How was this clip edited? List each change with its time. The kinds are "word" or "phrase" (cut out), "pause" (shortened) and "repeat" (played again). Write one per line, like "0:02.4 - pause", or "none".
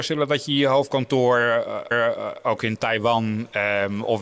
0:01.9 - repeat

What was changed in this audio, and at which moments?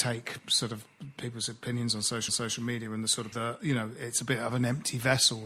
0:02.3 - repeat
0:03.3 - word

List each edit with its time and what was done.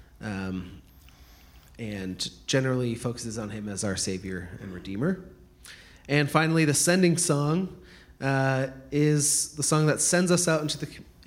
none

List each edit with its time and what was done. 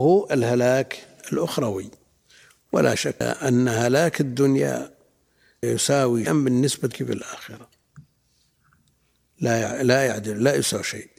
0:03.2 - word
0:05.6 - word
0:06.3 - word
0:06.9 - word

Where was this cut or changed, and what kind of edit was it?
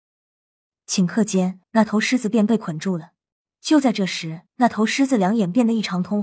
0:01.6 - pause
0:03.3 - pause
0:04.5 - pause

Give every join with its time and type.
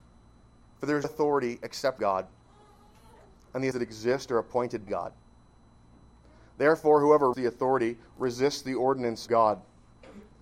0:01.0 - word
0:02.0 - word
0:03.7 - word
0:04.9 - word
0:07.3 - word
0:09.3 - word

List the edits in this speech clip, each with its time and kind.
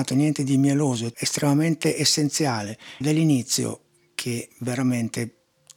0:01.1 - word
0:03.0 - word

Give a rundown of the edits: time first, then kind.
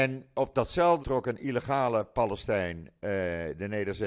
0:01.0 - word

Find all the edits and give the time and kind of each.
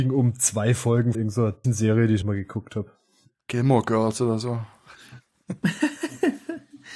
0:01.1 - word
0:01.6 - word
0:02.2 - word

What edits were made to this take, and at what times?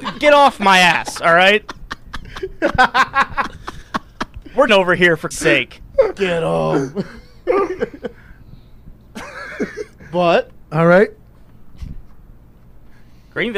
0:04.7 - word
0:05.3 - word

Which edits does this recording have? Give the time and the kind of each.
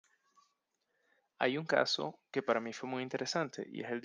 none

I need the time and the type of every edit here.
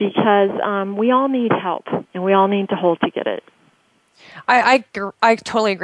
0:02.0 - pause
0:03.0 - word

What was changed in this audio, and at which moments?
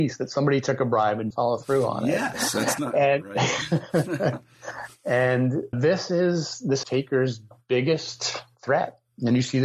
0:01.3 - word
0:05.7 - word
0:06.8 - phrase

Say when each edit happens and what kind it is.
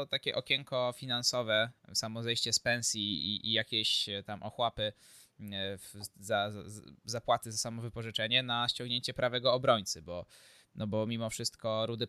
none

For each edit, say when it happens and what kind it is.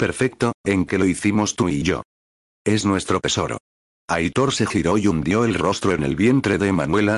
none

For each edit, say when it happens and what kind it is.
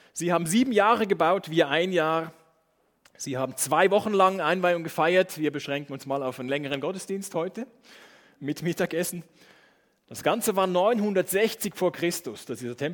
none

